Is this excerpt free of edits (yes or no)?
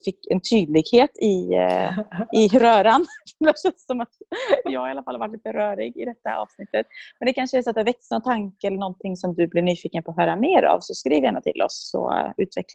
yes